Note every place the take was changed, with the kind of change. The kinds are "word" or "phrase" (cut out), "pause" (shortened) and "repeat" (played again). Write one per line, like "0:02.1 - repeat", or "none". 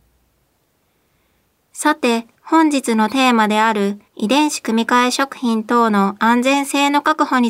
0:02.4 - pause
0:04.1 - pause